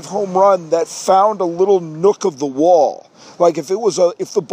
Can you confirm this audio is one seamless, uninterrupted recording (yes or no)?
yes